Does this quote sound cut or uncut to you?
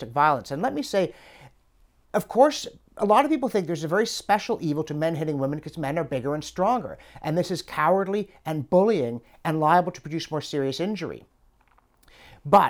uncut